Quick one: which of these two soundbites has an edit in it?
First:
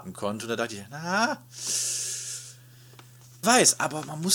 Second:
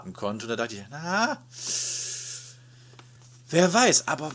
first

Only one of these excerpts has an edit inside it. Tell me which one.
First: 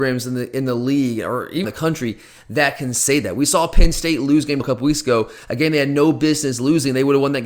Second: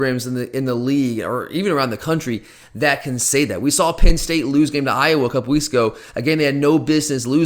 first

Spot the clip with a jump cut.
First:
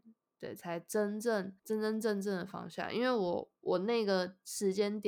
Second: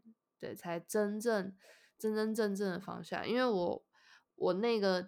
first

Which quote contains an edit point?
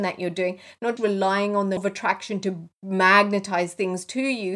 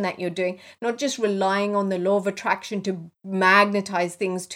first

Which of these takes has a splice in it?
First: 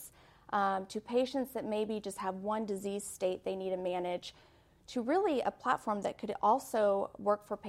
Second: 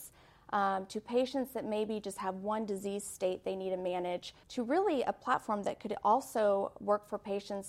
second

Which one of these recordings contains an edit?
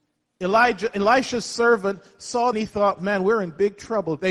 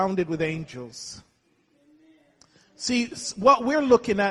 first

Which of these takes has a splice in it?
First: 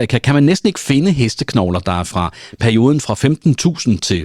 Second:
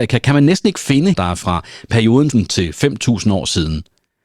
second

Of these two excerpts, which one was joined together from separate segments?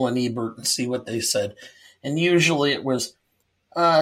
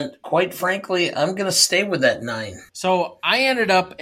second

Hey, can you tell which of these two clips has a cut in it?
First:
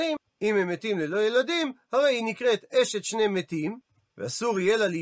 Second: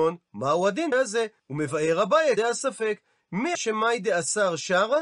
second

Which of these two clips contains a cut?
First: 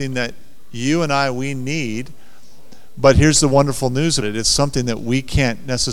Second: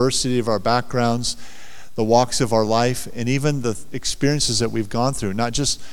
first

